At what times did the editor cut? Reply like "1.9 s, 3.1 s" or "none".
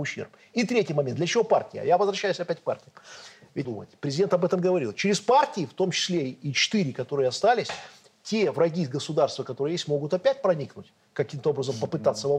3.6 s

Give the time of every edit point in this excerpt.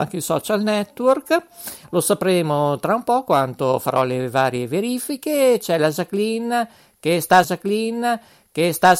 7.4 s

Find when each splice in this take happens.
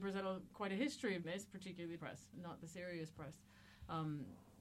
1.2 s, 2.0 s, 2.3 s

